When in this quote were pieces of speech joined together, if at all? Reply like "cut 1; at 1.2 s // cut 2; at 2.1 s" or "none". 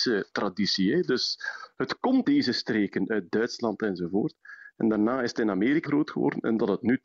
cut 1; at 2.2 s // cut 2; at 5.9 s